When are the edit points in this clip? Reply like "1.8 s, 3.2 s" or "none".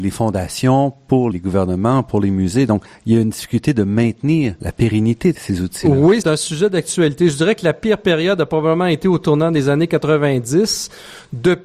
1.3 s, 4.6 s, 5.3 s, 6.2 s

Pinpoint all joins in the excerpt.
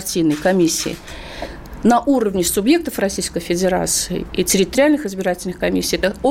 none

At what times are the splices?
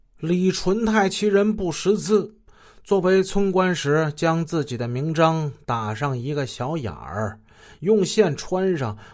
none

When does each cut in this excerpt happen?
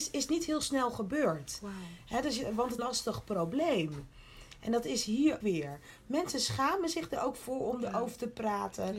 2.8 s, 5.4 s

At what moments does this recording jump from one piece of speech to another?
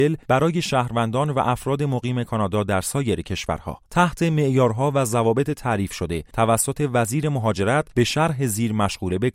3.9 s

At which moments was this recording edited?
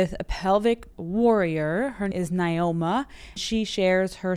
0.9 s, 2.1 s, 3.4 s

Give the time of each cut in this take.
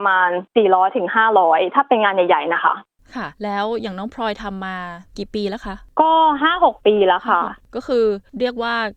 3.3 s, 5.1 s

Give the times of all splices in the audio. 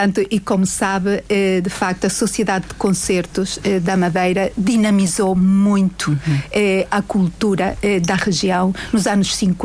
none

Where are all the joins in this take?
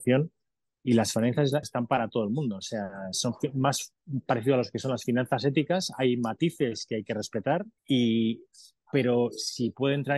1.6 s, 7.8 s

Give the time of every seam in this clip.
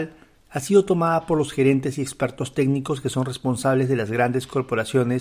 none

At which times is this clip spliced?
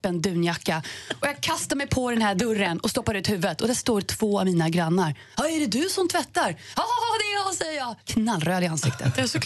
8.0 s

